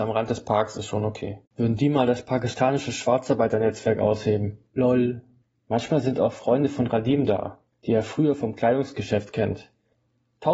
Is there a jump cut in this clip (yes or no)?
yes